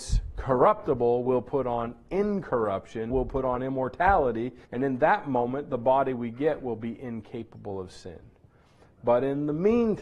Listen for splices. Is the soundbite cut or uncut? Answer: cut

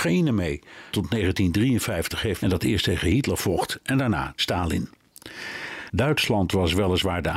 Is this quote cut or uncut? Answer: cut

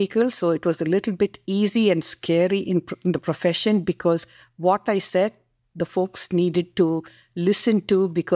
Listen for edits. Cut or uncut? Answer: uncut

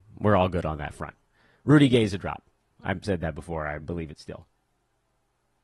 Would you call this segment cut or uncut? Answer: uncut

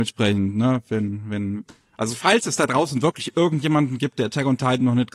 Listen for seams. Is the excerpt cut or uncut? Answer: uncut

